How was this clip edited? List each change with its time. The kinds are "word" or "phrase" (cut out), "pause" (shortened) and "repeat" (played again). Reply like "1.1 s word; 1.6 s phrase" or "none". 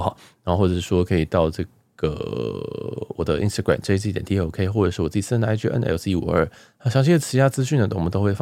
none